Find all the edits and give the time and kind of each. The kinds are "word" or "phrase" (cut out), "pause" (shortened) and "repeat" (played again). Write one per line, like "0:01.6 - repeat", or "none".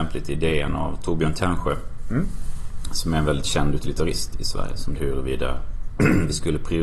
0:04.3 - word
0:04.9 - word